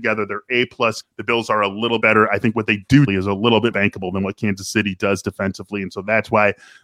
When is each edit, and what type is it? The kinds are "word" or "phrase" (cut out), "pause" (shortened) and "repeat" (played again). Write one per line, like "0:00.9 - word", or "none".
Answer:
0:01.0 - word
0:02.0 - word
0:03.1 - word
0:03.7 - word